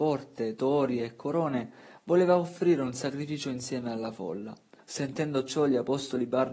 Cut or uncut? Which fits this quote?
cut